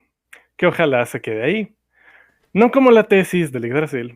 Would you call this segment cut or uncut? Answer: uncut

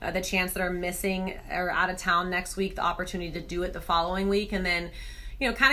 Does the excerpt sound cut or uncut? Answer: uncut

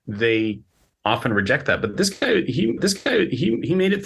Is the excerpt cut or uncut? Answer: cut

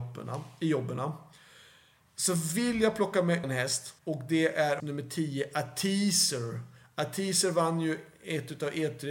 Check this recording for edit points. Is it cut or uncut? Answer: cut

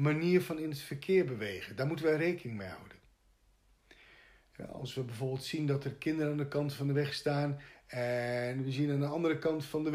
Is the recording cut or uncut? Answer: uncut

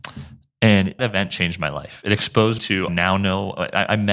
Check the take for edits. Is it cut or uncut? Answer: cut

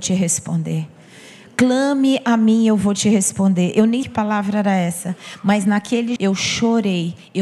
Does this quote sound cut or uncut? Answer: cut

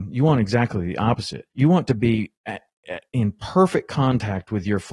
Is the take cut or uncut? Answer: cut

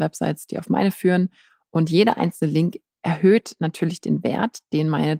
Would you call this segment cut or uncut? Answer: uncut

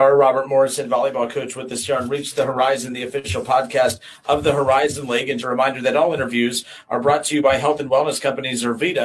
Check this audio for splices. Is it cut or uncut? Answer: cut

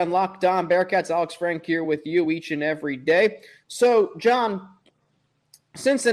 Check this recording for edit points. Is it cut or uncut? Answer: uncut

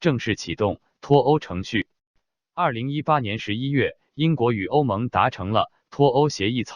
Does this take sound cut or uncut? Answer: uncut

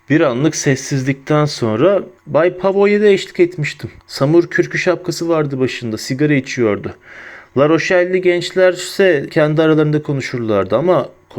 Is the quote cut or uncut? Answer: cut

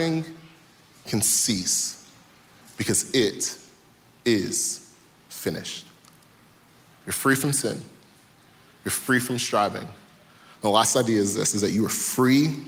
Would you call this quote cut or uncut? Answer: uncut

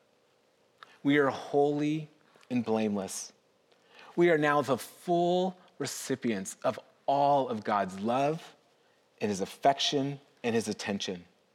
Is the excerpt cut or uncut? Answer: uncut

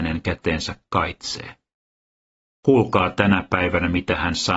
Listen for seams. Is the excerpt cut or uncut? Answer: uncut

